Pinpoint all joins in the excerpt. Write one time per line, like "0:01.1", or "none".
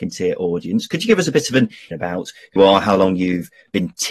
0:01.9
0:02.6